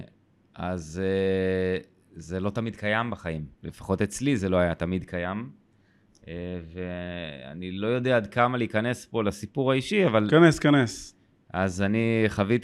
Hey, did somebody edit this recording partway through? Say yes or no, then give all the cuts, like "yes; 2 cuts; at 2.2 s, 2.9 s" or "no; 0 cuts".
yes; 1 cut; at 3.5 s